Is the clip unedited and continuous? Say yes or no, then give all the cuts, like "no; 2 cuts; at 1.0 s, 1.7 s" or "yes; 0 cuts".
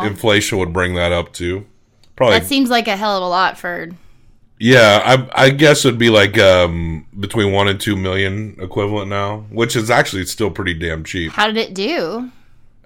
yes; 0 cuts